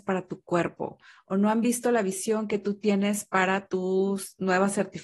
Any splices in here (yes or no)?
no